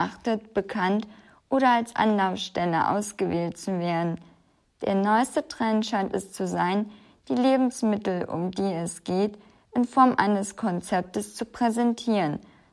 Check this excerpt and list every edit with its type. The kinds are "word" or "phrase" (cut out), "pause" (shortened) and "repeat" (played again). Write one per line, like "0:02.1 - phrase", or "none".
none